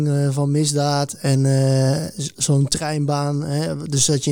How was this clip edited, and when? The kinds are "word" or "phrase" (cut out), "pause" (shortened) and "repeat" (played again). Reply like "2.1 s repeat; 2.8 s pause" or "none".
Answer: none